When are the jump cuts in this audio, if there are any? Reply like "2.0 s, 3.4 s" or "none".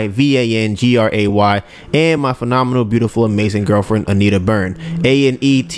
none